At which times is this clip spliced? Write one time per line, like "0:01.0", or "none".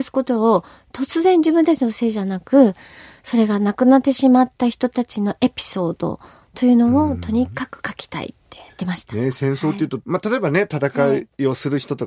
0:08.7